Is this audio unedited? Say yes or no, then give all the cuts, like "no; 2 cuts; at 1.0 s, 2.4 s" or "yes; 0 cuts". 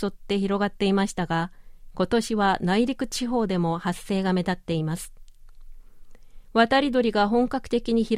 no; 1 cut; at 6.4 s